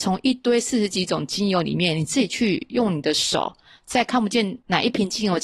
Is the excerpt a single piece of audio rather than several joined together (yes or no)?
yes